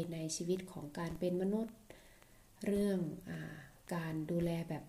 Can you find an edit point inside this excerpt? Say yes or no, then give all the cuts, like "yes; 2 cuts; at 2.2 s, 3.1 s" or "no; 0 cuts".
no; 0 cuts